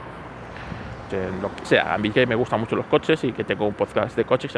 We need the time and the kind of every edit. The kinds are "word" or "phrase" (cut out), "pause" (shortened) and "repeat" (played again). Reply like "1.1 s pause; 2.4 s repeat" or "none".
1.1 s word; 1.6 s word; 2.1 s word